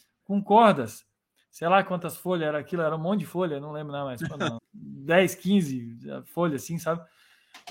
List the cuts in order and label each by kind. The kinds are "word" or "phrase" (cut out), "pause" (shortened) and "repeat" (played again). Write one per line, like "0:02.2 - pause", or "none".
0:04.6 - word